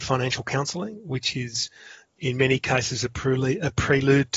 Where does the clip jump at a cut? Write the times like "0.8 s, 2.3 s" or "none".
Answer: 2.2 s